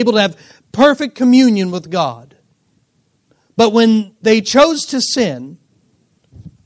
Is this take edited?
no; 0 cuts

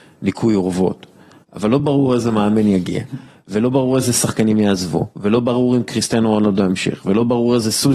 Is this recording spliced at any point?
no; 0 cuts

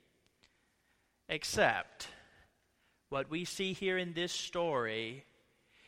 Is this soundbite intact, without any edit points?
yes; 0 cuts

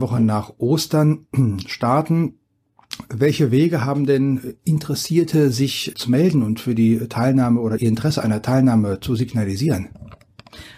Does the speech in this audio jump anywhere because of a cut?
yes; 2 cuts; at 5.9 s, 7.8 s

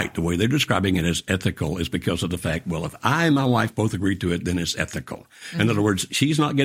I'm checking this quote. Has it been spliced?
no; 0 cuts

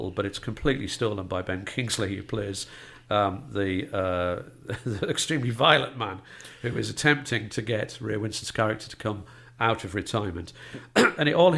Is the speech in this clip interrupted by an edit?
no; 0 cuts

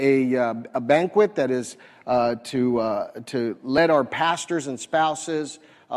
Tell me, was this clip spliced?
no; 0 cuts

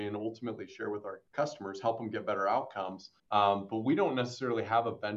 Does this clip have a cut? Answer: yes; 2 cuts; at 1.3 s, 3.2 s

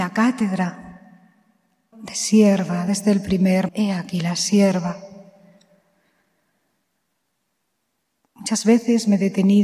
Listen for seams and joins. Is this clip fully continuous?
no; 2 cuts; at 1.9 s, 3.7 s

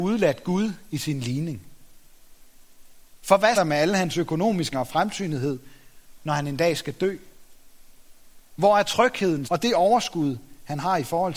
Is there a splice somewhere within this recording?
yes; 3 cuts; at 3.5 s, 4.7 s, 9.4 s

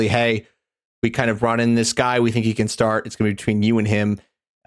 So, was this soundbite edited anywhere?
no; 0 cuts

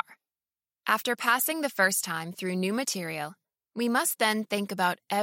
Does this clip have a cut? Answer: no; 0 cuts

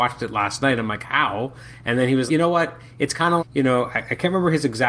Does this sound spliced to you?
yes; 2 cuts; at 2.3 s, 3.4 s

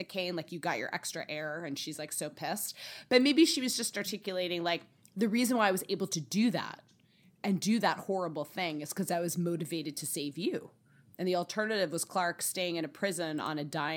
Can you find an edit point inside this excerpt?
no; 0 cuts

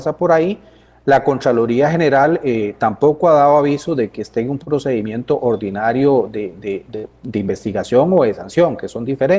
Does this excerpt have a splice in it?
no; 0 cuts

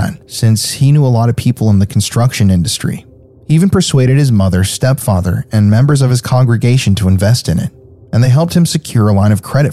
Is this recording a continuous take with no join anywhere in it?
yes; 0 cuts

